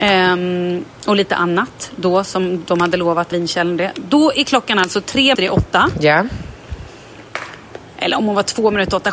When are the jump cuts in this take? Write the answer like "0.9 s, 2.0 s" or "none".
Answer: 0.9 s, 3.3 s, 5.3 s